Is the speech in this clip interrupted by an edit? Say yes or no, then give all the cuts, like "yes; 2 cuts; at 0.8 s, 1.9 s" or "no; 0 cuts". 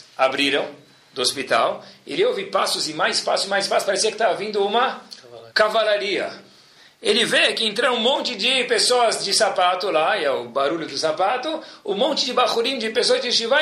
yes; 1 cut; at 5.5 s